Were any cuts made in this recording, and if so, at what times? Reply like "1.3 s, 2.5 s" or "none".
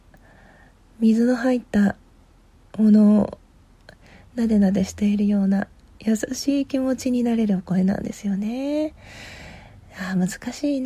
none